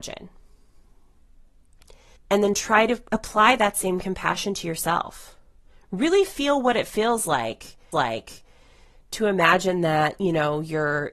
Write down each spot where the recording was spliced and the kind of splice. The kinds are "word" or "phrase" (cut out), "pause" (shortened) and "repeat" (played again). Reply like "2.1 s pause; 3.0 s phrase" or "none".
2.2 s pause; 7.9 s repeat